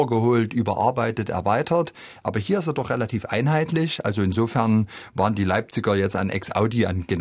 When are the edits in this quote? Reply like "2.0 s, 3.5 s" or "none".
none